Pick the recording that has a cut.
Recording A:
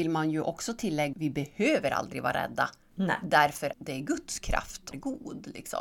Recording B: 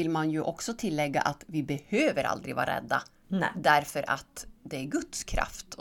A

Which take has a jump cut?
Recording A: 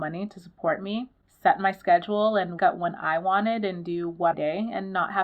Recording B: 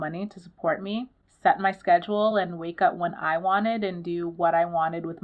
A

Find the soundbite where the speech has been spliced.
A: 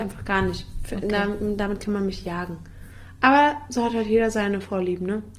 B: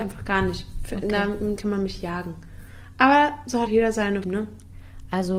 B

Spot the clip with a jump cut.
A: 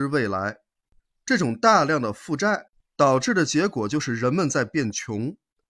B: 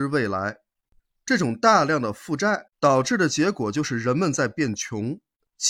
B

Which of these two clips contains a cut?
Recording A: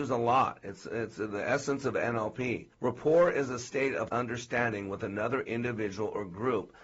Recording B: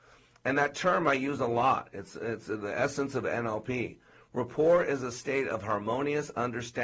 A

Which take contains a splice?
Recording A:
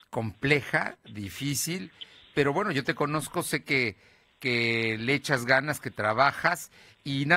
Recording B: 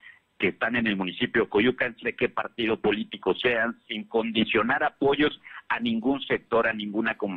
B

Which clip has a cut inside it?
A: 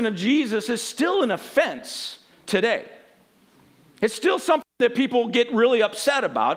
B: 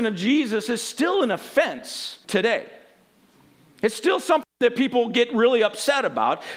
B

